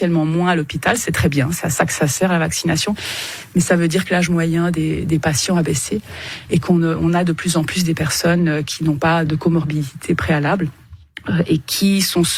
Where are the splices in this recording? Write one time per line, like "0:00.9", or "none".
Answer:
0:09.3